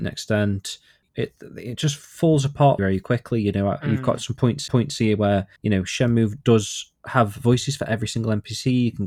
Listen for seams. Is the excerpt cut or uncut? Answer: cut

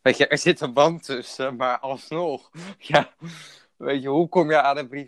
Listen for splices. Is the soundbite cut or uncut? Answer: uncut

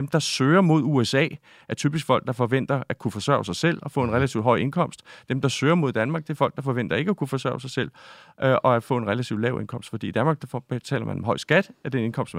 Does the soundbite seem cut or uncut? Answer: uncut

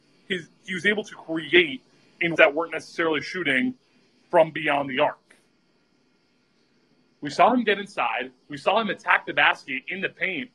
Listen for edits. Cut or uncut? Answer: cut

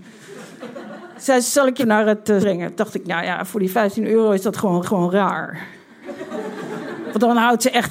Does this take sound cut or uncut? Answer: cut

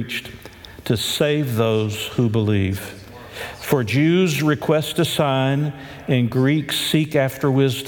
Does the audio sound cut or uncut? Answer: uncut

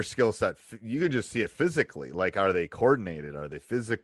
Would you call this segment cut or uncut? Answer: uncut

